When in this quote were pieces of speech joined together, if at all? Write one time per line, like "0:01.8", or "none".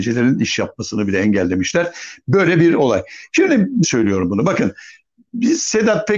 0:03.8